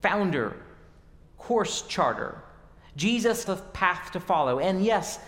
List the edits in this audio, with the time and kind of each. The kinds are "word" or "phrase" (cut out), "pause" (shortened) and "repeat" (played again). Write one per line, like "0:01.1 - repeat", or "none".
0:03.5 - phrase

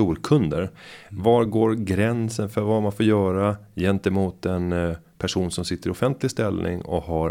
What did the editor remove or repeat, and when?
none

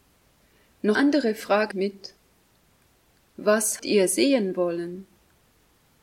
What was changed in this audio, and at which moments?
0:01.0 - word
0:01.7 - word
0:03.8 - word

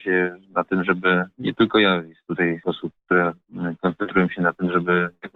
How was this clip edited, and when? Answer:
0:02.6 - word

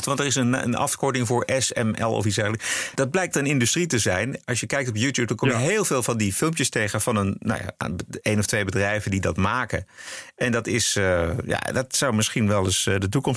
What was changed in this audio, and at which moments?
0:03.3 - word

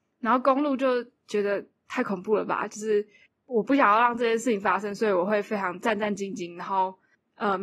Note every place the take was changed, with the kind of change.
none

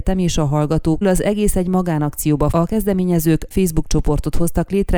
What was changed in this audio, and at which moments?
0:01.0 - phrase
0:02.5 - word
0:03.5 - word

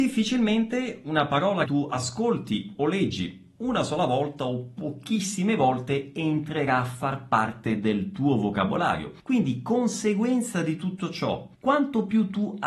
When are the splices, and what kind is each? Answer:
0:01.7 - word
0:09.2 - pause
0:11.5 - pause

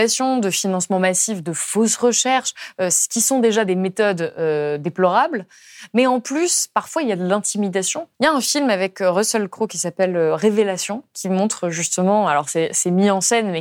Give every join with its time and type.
0:08.1 - pause

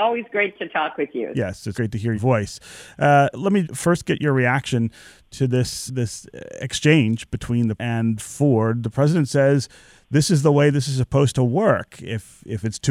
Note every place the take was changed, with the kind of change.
0:01.7 - word
0:02.2 - word
0:03.3 - word
0:03.6 - word
0:05.9 - word
0:07.8 - word

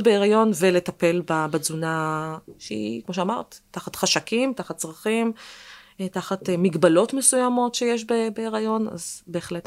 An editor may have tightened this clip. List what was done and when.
0:03.0 - word

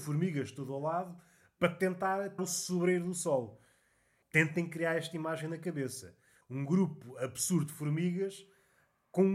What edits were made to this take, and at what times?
0:02.4 - word

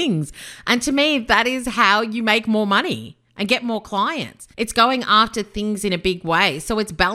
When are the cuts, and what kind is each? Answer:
0:04.5 - pause

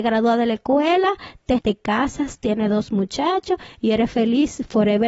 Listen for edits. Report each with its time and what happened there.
0:01.6 - word

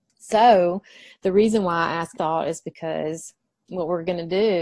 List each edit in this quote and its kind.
0:02.1 - phrase

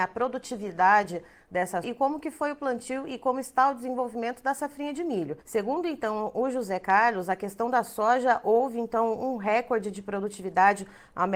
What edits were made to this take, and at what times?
0:01.8 - word
0:05.4 - pause

